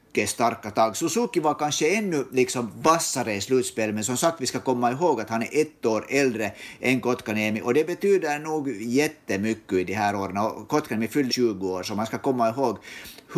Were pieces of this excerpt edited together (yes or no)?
yes